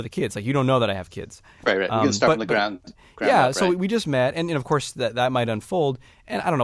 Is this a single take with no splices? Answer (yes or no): yes